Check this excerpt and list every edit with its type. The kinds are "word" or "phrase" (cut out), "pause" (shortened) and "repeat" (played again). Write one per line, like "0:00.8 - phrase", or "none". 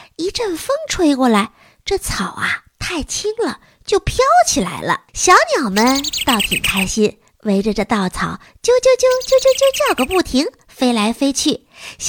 0:05.1 - pause

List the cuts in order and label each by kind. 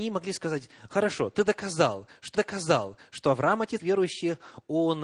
0:02.3 - repeat
0:03.8 - word

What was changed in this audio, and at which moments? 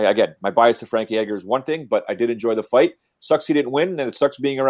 none

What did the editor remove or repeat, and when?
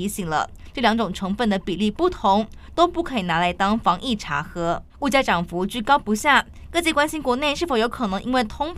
0:04.9 - pause

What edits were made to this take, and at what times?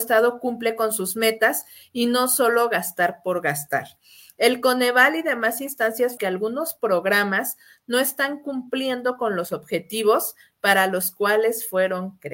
0:06.2 - phrase

